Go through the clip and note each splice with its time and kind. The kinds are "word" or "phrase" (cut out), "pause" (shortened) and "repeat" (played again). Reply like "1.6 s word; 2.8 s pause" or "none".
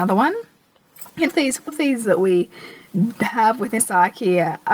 1.3 s word; 1.7 s word; 2.0 s word; 3.8 s word